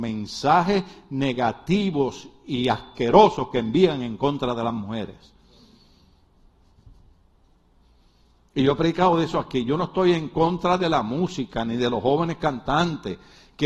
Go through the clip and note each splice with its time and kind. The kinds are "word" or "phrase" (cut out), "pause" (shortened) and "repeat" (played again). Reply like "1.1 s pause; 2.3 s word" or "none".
none